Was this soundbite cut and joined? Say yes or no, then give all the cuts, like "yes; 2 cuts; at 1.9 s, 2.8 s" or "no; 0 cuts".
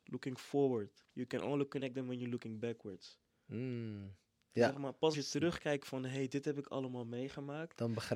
yes; 2 cuts; at 1.1 s, 5.1 s